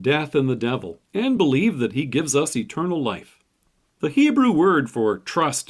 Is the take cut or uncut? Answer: uncut